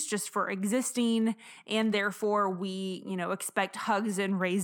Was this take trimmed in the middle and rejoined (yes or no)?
no